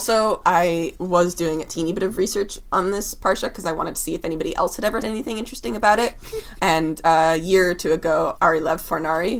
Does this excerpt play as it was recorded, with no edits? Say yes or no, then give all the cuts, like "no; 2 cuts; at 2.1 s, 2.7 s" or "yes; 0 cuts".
no; 1 cut; at 5.0 s